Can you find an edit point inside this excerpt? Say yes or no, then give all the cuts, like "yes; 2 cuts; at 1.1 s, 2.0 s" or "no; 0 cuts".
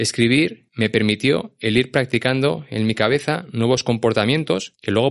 no; 0 cuts